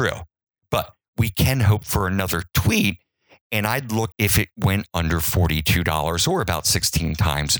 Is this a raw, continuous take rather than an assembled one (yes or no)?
no